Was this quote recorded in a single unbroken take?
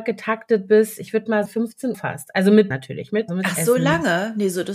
no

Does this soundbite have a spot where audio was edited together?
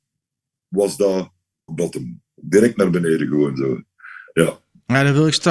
yes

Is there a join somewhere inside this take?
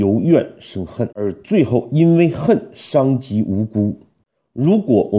yes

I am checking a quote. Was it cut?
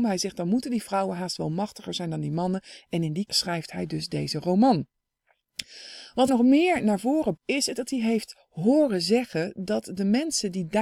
yes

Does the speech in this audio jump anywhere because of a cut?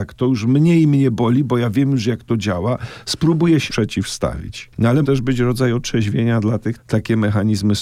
yes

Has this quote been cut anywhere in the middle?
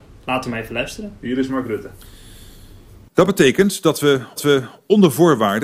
yes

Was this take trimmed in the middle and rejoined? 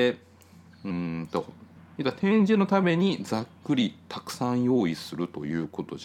yes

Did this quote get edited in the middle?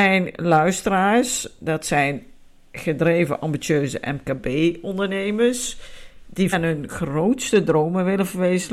yes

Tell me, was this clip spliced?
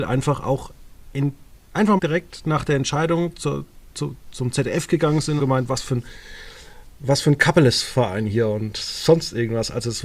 yes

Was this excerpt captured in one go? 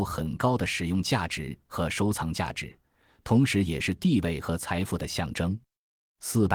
yes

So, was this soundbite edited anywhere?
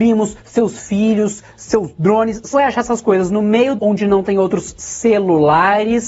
yes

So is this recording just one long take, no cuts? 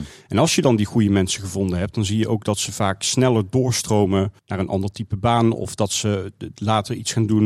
no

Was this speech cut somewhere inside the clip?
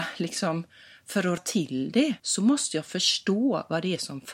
yes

